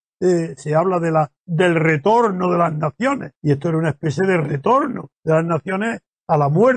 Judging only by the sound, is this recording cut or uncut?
cut